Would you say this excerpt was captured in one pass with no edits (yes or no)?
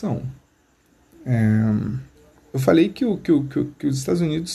no